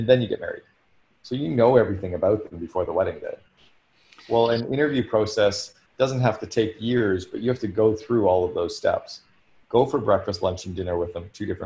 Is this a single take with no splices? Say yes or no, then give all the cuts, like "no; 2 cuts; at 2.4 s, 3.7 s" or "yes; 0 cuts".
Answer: yes; 0 cuts